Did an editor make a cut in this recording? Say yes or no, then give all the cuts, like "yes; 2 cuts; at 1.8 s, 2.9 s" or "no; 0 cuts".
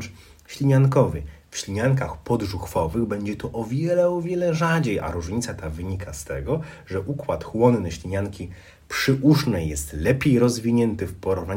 no; 0 cuts